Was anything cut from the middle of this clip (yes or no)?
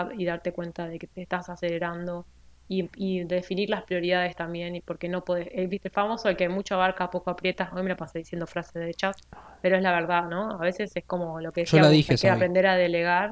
no